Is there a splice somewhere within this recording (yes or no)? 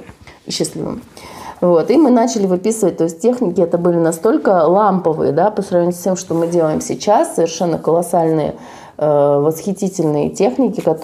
no